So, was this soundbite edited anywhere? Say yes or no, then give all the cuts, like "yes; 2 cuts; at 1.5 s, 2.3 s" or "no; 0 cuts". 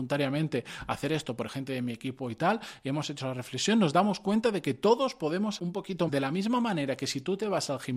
yes; 3 cuts; at 1.5 s, 5.6 s, 6.1 s